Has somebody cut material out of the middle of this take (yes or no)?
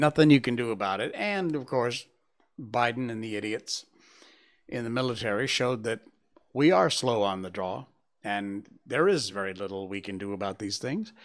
no